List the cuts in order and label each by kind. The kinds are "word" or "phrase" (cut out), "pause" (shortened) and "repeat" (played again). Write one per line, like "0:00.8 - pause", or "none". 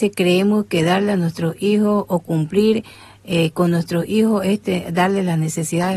none